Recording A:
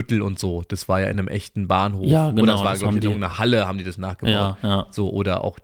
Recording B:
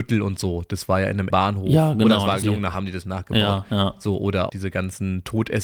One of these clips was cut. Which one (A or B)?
B